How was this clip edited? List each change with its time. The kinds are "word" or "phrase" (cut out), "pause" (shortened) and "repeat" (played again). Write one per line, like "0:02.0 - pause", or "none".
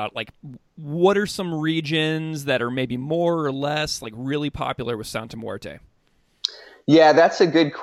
none